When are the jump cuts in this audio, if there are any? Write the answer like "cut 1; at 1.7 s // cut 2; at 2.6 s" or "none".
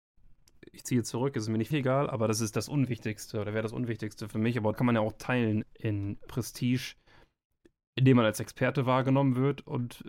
cut 1; at 1.7 s // cut 2; at 4.7 s // cut 3; at 5.6 s // cut 4; at 6.3 s